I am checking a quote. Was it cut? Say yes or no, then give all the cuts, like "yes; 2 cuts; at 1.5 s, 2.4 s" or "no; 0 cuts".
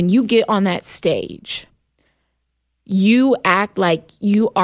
no; 0 cuts